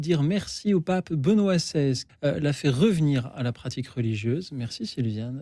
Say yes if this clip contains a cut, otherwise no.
yes